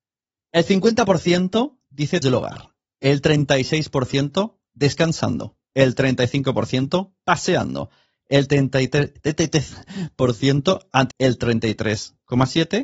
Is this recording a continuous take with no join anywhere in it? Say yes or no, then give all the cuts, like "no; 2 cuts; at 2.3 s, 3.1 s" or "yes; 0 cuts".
no; 2 cuts; at 2.2 s, 11.1 s